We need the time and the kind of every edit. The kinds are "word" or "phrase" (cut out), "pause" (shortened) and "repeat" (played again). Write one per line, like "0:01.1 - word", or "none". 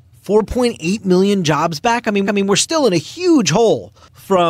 0:02.3 - repeat